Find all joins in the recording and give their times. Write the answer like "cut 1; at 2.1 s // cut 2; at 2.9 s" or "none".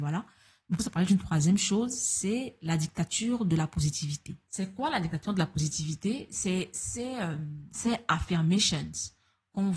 cut 1; at 4.4 s

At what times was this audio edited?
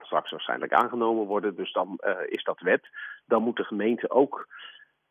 none

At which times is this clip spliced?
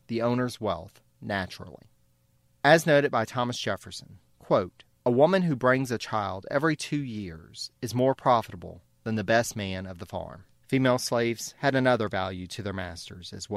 cut 1; at 10.5 s

